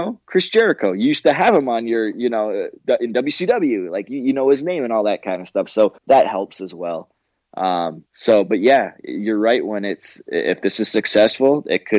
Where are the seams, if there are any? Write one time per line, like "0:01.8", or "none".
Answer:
0:02.8
0:06.0
0:08.1